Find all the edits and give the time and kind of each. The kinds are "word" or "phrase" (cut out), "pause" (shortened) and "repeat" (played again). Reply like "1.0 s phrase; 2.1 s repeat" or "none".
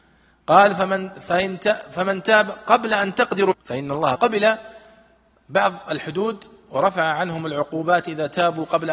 3.5 s word; 4.1 s phrase